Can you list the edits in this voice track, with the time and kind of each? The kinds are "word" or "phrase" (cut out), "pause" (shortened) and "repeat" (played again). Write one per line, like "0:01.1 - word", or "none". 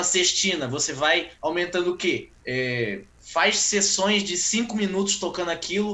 0:01.4 - pause
0:02.4 - pause